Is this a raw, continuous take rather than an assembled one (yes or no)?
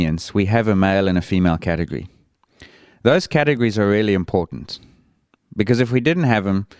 yes